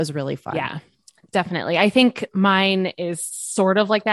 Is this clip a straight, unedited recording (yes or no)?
yes